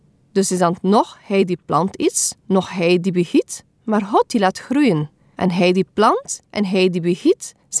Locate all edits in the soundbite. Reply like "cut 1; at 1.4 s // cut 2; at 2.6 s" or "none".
cut 1; at 2.4 s // cut 2; at 5.2 s // cut 3; at 6.4 s